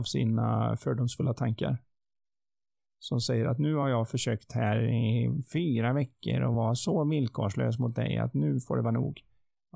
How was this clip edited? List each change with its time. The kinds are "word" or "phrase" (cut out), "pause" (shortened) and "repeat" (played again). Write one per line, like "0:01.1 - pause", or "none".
none